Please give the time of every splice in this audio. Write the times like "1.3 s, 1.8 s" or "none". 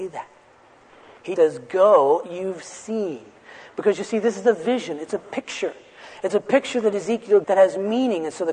1.4 s, 2.2 s, 7.4 s